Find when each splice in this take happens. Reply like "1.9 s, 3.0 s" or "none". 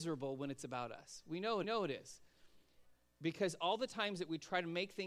1.6 s